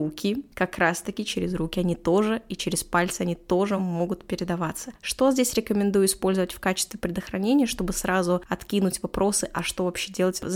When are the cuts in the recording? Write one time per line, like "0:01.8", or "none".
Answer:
none